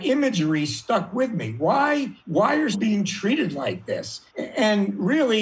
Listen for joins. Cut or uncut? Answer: cut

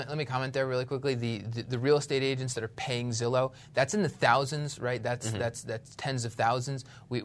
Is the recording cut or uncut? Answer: uncut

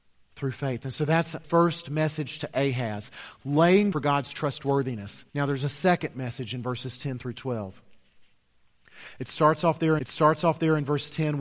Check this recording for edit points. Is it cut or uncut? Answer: cut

